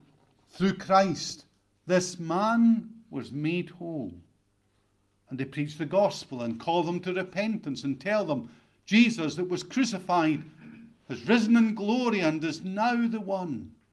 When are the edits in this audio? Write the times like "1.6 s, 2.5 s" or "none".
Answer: none